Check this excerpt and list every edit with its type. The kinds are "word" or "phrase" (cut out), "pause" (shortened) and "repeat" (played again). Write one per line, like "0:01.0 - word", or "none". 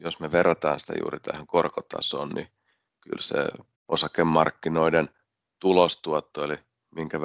0:03.8 - pause